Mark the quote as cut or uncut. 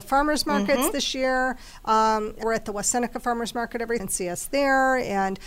cut